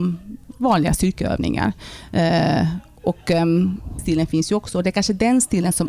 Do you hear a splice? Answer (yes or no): yes